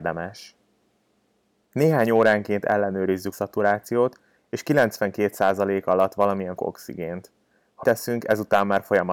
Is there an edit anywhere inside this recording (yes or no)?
yes